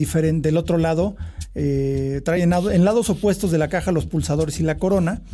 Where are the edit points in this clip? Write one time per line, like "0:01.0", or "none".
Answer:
none

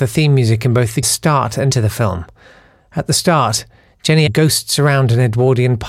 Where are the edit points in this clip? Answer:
0:01.0
0:01.7
0:04.3

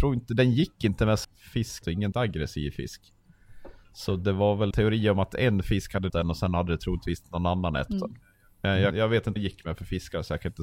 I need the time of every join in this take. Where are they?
0:01.2
0:01.8
0:02.1
0:04.7
0:06.1
0:07.9
0:08.9
0:09.4

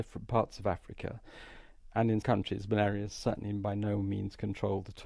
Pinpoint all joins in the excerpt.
0:02.2

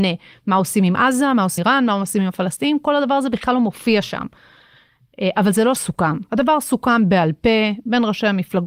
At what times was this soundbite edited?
0:01.6
0:05.8
0:06.3

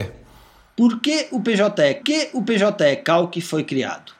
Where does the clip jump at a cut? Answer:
0:02.0

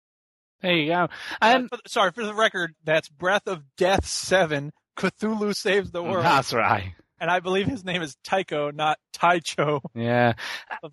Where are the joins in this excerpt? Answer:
0:01.7
0:02.7

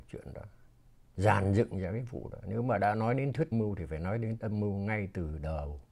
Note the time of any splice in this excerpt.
0:03.5
0:04.4

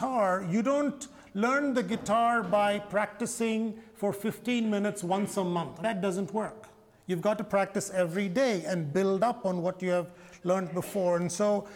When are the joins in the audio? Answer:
none

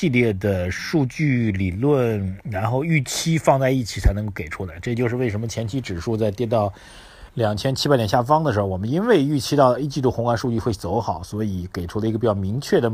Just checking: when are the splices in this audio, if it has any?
0:07.3

